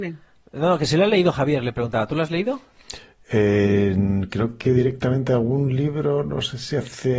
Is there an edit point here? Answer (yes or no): no